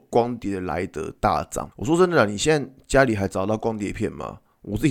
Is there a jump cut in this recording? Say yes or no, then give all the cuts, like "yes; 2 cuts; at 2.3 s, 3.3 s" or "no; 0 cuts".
yes; 1 cut; at 1.7 s